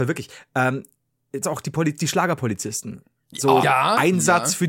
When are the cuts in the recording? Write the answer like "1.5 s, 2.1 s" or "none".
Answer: 1.4 s, 3.6 s